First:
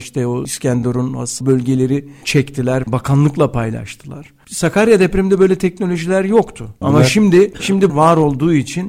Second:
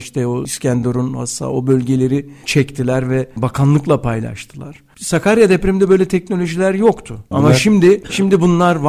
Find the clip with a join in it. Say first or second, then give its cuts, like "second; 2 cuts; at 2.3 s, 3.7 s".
first; 3 cuts; at 1.4 s, 2.8 s, 7.9 s